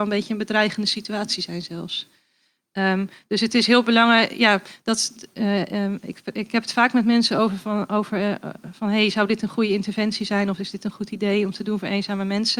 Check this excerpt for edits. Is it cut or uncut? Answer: uncut